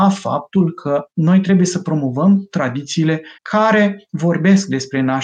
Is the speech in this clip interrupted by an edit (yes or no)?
yes